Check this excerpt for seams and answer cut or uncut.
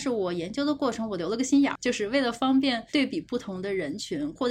cut